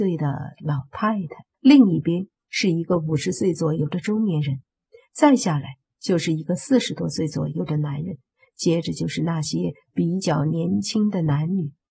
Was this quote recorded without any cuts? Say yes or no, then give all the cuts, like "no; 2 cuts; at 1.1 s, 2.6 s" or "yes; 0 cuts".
no; 1 cut; at 1.5 s